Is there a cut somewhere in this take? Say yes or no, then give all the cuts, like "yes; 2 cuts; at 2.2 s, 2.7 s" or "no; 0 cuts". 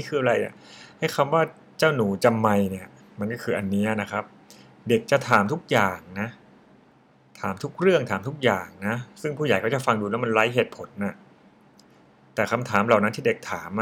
no; 0 cuts